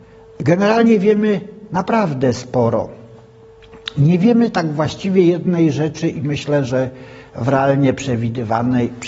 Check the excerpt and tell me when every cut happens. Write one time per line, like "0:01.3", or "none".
none